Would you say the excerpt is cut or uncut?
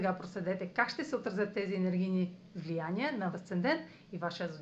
cut